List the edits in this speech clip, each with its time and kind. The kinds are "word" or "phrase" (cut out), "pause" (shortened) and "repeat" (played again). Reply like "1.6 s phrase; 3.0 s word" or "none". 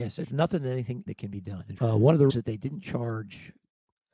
1.1 s word; 1.8 s word; 2.3 s word